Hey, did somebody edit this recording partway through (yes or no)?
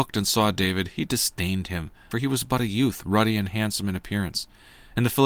no